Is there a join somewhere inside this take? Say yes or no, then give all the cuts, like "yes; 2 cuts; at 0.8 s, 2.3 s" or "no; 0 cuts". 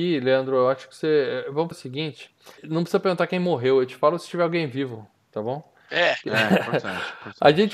yes; 2 cuts; at 1.7 s, 2.6 s